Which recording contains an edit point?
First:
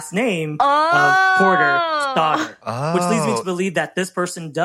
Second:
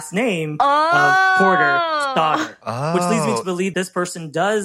second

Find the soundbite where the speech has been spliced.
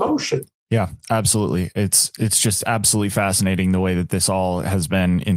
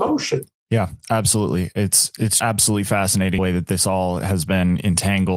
second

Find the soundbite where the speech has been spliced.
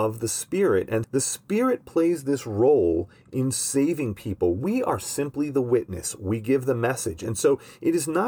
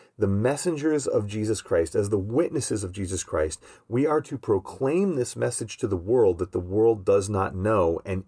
first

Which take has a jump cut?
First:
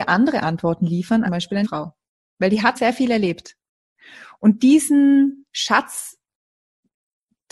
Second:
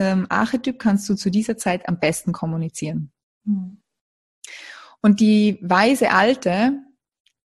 first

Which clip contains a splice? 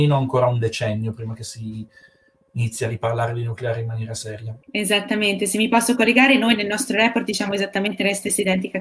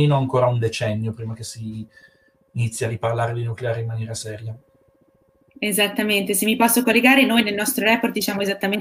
first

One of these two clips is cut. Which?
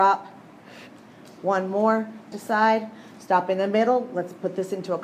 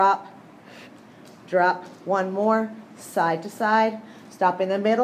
first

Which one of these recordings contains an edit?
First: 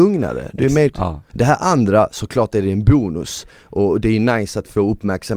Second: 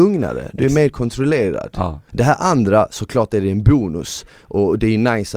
first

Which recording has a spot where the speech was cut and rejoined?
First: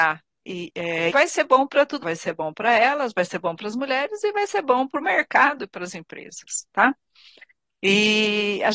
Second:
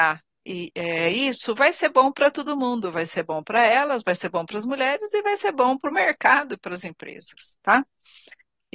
first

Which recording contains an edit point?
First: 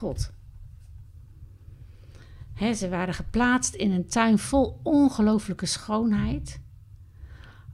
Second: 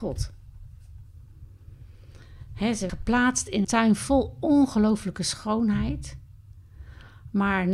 second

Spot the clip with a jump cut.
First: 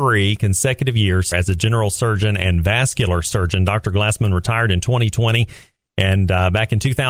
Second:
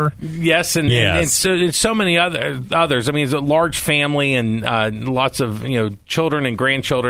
first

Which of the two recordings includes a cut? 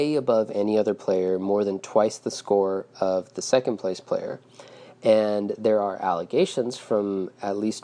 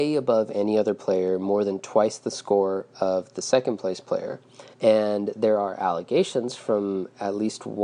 second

